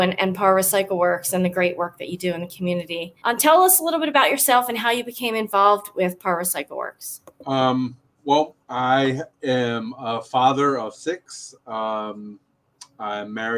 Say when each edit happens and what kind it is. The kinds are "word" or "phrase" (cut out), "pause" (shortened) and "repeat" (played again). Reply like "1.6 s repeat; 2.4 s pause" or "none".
3.2 s pause; 8.6 s pause